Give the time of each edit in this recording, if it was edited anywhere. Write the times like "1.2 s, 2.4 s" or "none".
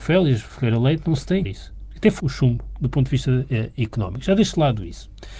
1.4 s, 2.2 s